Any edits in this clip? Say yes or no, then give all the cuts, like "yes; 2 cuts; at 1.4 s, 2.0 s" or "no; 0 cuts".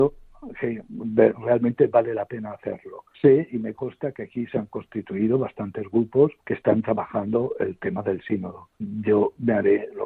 yes; 3 cuts; at 3.1 s, 6.4 s, 8.7 s